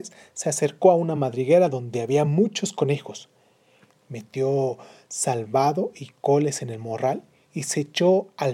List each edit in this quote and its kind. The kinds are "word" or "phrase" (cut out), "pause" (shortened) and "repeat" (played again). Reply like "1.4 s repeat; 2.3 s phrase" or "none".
none